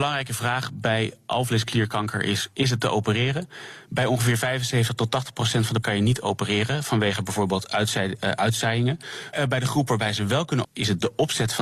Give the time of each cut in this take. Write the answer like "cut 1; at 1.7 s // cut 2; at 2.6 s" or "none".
cut 1; at 5.8 s // cut 2; at 9.3 s // cut 3; at 10.6 s